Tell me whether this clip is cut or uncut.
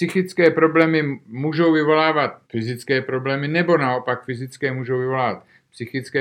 cut